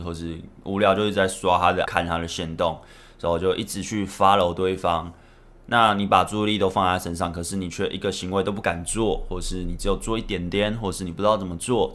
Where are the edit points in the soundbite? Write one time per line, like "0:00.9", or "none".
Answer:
0:01.8